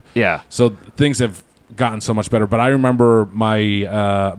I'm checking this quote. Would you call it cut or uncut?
uncut